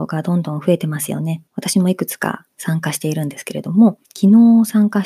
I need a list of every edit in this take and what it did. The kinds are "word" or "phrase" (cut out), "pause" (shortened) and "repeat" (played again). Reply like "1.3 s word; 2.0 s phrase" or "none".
1.5 s pause; 4.0 s pause

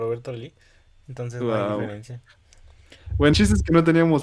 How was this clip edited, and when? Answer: 3.3 s word

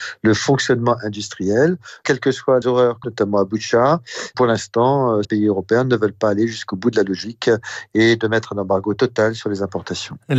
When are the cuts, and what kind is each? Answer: 2.6 s word; 3.0 s phrase; 5.2 s word

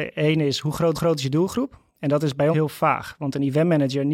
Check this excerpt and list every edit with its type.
0.9 s repeat; 2.5 s word

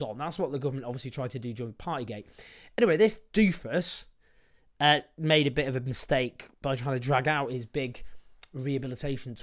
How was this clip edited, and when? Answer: none

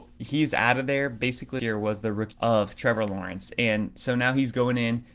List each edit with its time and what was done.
1.6 s word; 2.3 s word

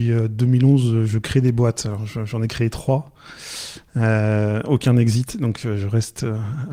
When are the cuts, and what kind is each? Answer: none

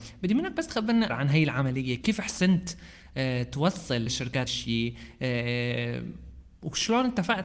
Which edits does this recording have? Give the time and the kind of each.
1.1 s word; 2.0 s word; 4.1 s word; 4.5 s word

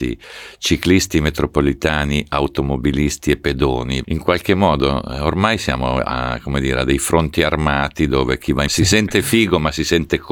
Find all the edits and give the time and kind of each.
4.0 s word; 8.7 s word

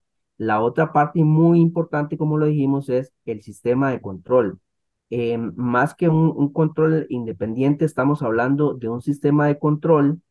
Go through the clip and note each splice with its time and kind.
none

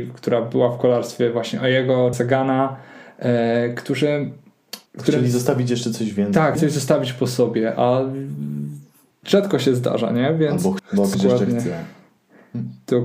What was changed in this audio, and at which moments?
2.1 s phrase; 4.9 s pause; 6.6 s word; 9.1 s pause; 10.8 s word; 11.1 s word

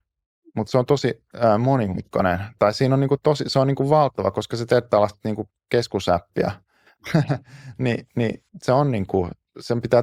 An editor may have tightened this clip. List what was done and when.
5.5 s word; 8.5 s pause

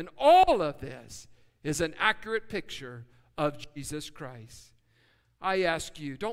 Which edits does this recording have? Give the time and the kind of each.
none

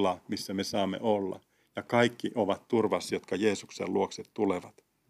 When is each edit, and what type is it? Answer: none

